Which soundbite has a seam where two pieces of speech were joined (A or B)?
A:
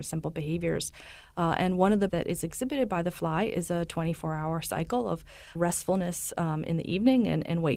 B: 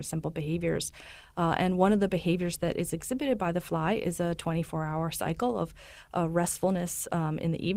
A